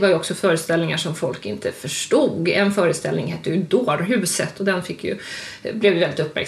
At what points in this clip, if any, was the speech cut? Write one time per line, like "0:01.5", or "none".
none